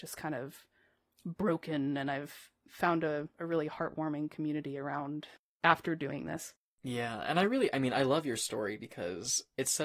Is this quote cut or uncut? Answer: uncut